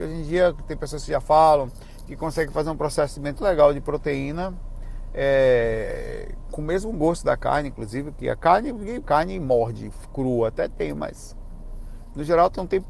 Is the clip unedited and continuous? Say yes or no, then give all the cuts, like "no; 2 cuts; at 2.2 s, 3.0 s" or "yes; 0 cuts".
no; 2 cuts; at 3.4 s, 9.0 s